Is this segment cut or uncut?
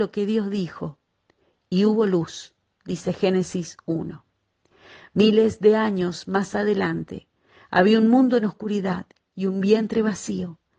uncut